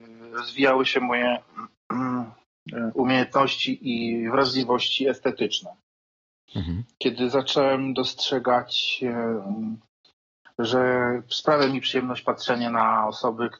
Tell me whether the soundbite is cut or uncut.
uncut